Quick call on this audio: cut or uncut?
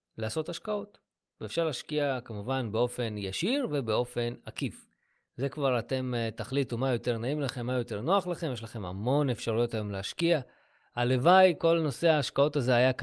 uncut